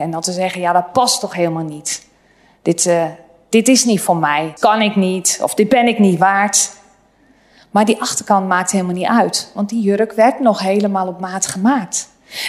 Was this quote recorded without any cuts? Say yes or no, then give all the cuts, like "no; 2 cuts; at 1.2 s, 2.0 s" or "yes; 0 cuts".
no; 1 cut; at 4.6 s